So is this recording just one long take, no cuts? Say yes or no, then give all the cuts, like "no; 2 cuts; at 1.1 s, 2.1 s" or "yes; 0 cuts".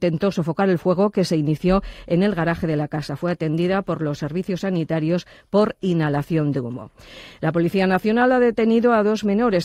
yes; 0 cuts